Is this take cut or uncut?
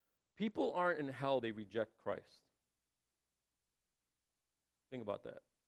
cut